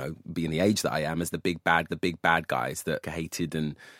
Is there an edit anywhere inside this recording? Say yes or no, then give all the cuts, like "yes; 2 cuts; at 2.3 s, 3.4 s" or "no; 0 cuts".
yes; 2 cuts; at 1.9 s, 3.0 s